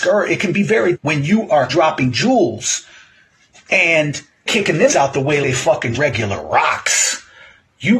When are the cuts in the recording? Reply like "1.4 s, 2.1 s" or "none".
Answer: 0.9 s, 1.7 s, 4.5 s, 4.9 s, 5.4 s, 5.9 s